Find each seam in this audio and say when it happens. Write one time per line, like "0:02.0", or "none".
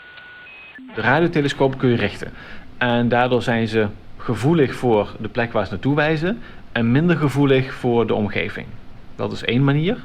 none